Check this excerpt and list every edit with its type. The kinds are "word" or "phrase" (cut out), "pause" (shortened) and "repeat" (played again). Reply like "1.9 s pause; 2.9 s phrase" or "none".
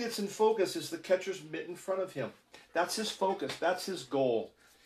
none